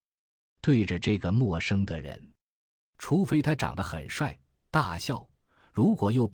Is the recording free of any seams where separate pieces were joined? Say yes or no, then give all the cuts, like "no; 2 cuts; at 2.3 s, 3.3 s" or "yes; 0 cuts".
yes; 0 cuts